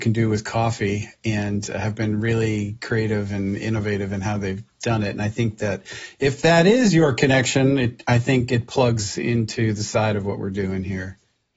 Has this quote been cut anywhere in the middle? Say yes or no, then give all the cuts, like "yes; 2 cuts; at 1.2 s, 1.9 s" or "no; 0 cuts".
no; 0 cuts